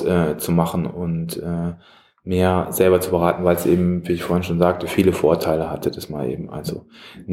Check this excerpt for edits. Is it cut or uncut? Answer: uncut